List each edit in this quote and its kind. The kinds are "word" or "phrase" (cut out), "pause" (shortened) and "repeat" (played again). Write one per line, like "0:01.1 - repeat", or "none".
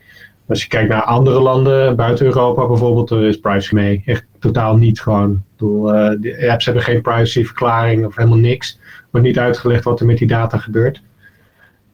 0:03.7 - phrase